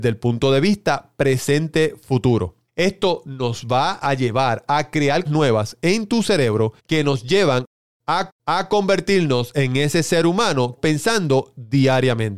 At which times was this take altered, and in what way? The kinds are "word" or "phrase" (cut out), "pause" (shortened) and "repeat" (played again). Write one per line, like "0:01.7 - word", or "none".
0:02.7 - pause
0:05.3 - phrase
0:06.8 - pause
0:08.3 - repeat
0:10.8 - phrase